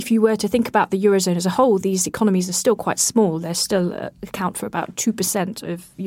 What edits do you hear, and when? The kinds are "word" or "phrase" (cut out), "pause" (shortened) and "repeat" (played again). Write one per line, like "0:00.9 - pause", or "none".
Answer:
none